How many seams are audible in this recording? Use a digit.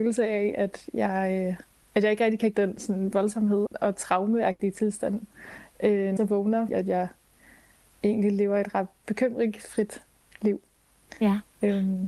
5